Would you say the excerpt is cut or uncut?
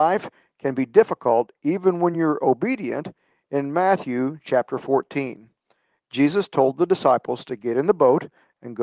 uncut